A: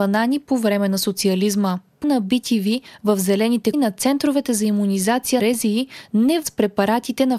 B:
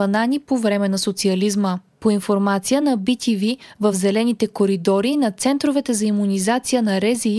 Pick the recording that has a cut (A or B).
A